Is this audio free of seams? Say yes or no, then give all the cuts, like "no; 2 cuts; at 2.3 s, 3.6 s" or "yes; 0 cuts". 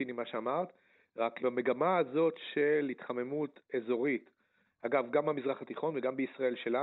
no; 1 cut; at 1.4 s